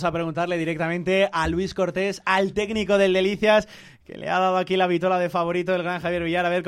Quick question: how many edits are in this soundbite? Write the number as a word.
zero